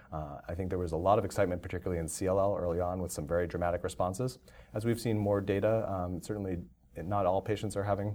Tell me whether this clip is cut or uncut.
uncut